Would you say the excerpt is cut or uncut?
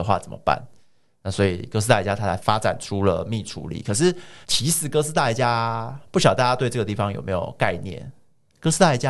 cut